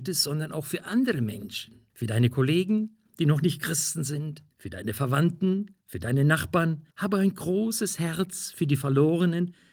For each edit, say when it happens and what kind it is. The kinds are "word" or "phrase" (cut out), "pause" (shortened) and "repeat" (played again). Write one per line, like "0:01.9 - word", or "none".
0:01.9 - pause
0:04.5 - pause
0:05.8 - pause
0:06.9 - pause